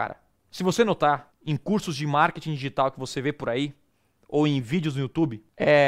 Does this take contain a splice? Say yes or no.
no